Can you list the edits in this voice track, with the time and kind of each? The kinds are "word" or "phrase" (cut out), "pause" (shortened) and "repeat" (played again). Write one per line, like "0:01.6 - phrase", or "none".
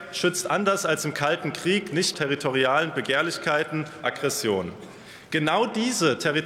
0:02.1 - phrase
0:04.0 - phrase